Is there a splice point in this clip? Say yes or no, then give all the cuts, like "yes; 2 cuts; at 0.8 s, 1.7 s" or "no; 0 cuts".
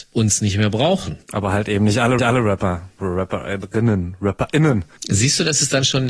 yes; 2 cuts; at 1.2 s, 2.2 s